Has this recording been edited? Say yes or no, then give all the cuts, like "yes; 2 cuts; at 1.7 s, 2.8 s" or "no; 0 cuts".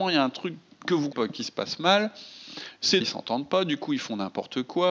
yes; 2 cuts; at 1.1 s, 3.0 s